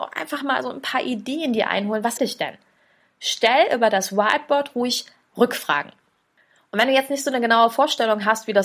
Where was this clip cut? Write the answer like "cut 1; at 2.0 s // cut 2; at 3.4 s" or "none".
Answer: cut 1; at 2.2 s // cut 2; at 5.3 s